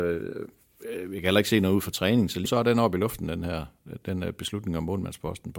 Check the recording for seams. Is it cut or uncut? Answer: cut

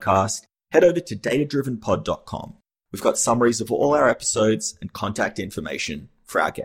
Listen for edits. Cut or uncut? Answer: uncut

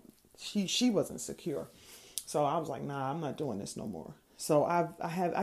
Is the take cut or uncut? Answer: uncut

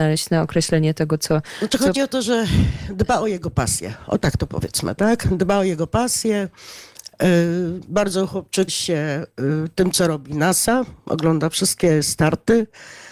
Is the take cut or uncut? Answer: cut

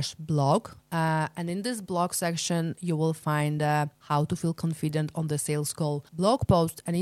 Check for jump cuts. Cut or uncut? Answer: cut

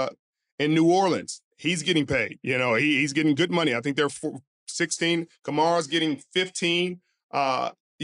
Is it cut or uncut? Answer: uncut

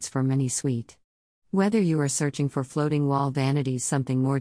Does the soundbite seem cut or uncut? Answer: uncut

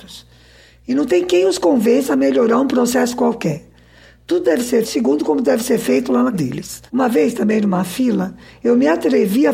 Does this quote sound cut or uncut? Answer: cut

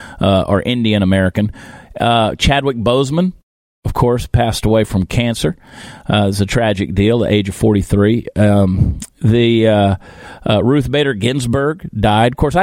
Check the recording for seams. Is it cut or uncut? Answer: uncut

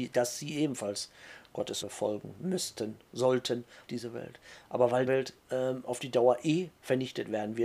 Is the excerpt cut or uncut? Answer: cut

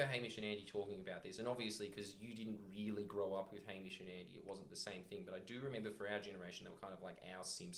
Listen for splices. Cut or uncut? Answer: uncut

